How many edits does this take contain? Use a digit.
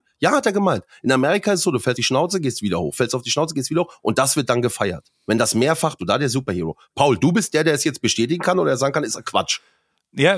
3